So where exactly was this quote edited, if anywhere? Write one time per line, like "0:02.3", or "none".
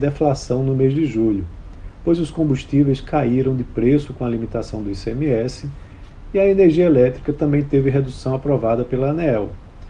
none

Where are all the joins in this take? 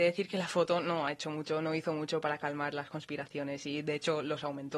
none

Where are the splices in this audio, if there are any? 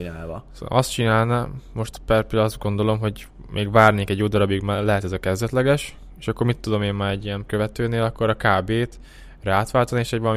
0:07.5

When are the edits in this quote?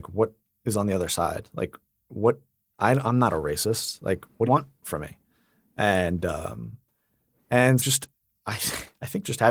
0:04.4
0:07.8

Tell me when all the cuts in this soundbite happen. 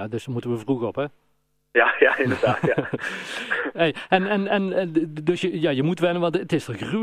none

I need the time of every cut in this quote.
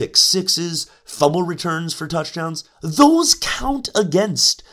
0:02.7

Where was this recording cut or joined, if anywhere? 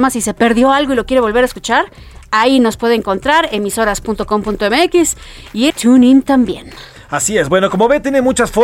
0:05.7

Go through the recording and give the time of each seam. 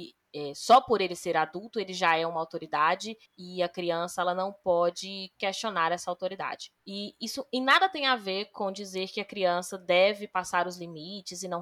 0:03.3
0:06.8

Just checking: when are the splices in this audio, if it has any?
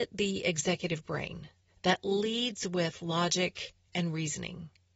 none

